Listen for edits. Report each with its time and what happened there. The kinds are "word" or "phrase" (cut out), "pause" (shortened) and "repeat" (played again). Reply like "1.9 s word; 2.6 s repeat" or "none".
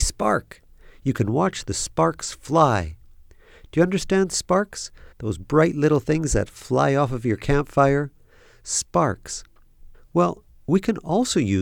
5.1 s pause; 9.9 s pause